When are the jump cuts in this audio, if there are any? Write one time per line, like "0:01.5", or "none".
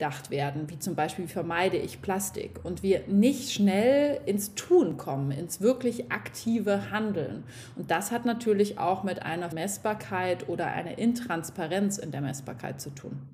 0:09.5